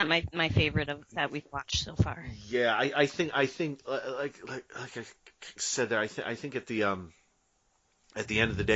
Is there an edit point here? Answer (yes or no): no